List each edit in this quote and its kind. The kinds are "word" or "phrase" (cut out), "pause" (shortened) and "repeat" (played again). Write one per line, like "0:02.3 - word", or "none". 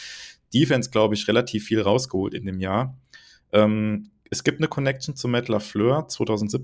none

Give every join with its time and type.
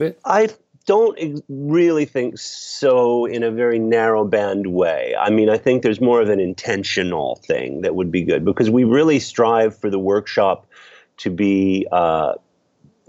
none

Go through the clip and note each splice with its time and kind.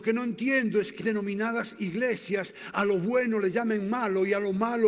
0:01.0 - word

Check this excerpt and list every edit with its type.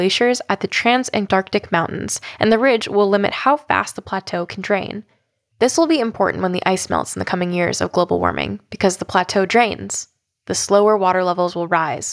none

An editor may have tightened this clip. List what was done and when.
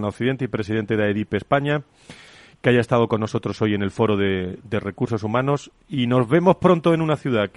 none

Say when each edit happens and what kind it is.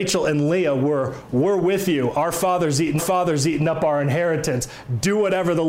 0:03.0 - repeat

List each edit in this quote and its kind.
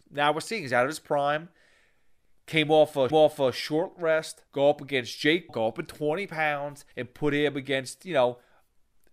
0:03.1 - repeat
0:04.5 - pause
0:05.5 - word
0:06.9 - pause

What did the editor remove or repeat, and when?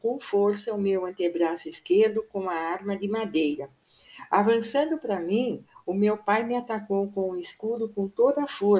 none

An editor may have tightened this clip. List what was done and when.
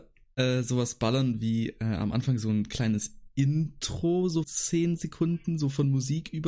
0:04.4 - word

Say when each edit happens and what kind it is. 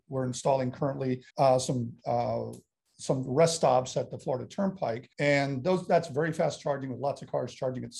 0:01.3 - pause
0:05.1 - pause

